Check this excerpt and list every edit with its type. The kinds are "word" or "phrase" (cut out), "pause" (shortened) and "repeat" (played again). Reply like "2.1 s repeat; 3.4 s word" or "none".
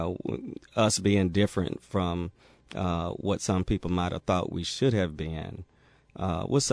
none